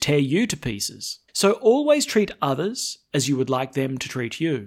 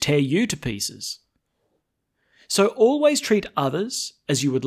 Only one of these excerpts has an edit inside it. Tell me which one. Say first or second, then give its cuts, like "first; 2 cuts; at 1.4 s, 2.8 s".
first; 1 cut; at 1.3 s